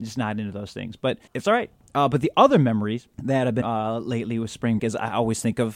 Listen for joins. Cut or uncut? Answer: cut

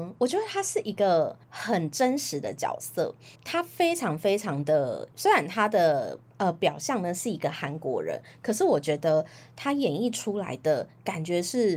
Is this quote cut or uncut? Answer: cut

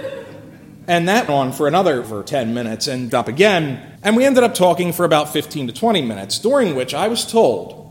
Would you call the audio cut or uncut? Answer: cut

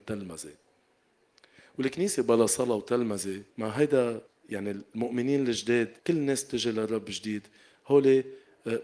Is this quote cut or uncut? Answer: cut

